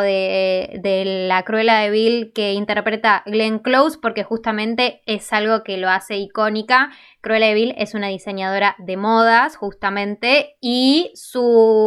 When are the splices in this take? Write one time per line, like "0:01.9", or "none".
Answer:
none